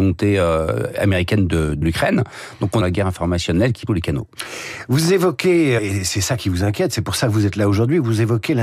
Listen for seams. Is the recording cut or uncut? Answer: cut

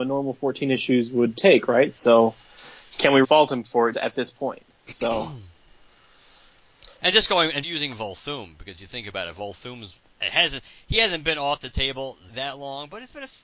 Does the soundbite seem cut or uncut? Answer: cut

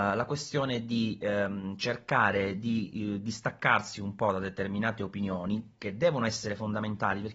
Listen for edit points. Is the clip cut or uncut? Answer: uncut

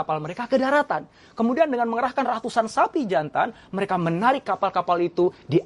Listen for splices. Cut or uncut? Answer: uncut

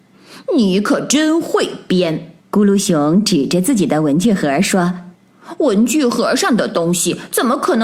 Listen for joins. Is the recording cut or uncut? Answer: cut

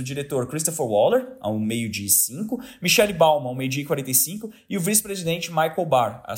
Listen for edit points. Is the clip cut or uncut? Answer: uncut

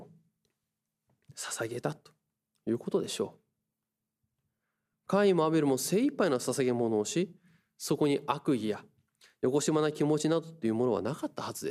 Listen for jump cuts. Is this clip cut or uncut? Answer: uncut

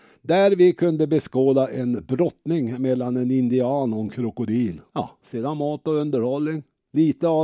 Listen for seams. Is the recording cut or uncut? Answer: cut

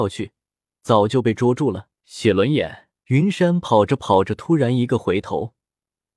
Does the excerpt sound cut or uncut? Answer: cut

